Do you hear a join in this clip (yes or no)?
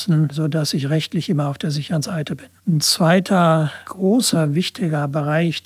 yes